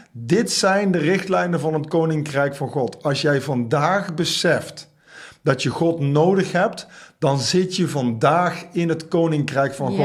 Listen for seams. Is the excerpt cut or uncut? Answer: uncut